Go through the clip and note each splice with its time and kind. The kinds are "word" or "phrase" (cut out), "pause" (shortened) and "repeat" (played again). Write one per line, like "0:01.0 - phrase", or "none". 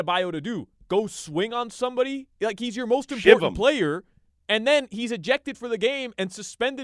none